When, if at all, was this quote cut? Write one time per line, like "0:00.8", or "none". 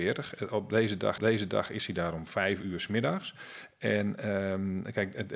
0:01.2